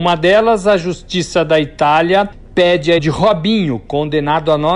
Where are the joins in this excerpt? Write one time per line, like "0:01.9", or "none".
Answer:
0:03.0